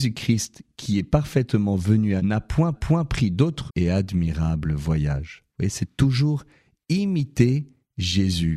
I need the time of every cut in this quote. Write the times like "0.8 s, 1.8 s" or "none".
2.2 s, 2.7 s, 3.7 s, 5.5 s